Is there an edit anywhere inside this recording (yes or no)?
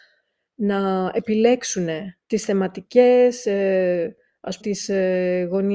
yes